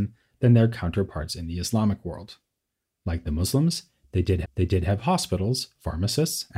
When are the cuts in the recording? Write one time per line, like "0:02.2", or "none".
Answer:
0:04.4